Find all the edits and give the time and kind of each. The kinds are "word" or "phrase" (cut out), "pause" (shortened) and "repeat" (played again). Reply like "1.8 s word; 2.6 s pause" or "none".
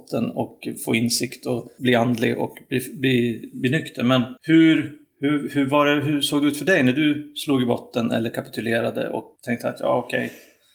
4.4 s pause; 9.4 s pause